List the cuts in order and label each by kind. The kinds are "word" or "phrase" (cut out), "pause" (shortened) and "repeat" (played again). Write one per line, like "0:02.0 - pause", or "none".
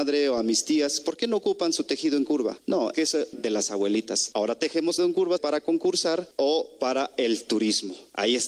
0:02.9 - word
0:03.3 - word
0:05.0 - word
0:05.4 - word